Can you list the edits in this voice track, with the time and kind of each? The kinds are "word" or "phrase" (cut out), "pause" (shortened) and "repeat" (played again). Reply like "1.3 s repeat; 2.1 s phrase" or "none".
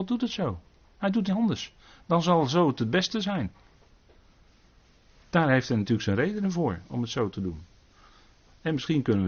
1.3 s word